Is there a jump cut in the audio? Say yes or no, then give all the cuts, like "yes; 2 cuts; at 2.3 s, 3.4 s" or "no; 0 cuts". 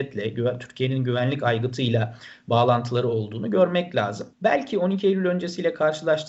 yes; 1 cut; at 4.3 s